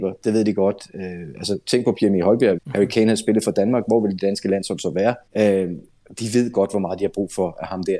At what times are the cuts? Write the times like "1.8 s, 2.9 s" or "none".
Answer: 2.6 s, 5.3 s